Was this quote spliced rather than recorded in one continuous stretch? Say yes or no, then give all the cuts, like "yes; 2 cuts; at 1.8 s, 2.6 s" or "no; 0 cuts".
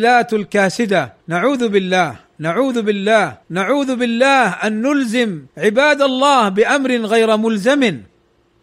yes; 3 cuts; at 1.2 s, 3.4 s, 5.5 s